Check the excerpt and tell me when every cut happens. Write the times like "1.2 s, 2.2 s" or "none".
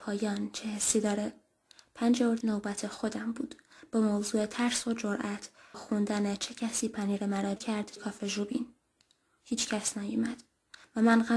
2.4 s, 5.7 s, 7.6 s, 8.0 s